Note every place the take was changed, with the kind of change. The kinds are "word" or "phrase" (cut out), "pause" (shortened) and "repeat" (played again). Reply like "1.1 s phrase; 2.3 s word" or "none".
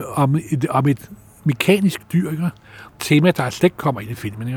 3.0 s phrase